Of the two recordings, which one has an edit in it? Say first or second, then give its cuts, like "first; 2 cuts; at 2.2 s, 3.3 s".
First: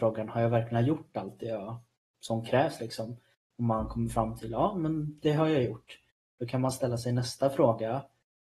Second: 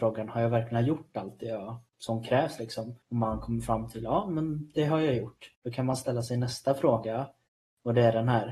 second; 3 cuts; at 1.9 s, 3.0 s, 5.5 s